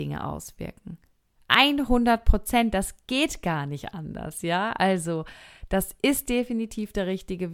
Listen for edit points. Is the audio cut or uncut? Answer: uncut